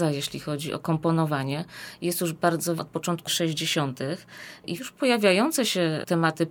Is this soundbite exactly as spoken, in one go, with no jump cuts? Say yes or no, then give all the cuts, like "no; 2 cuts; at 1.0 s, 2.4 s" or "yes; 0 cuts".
no; 3 cuts; at 2.8 s, 3.3 s, 4.8 s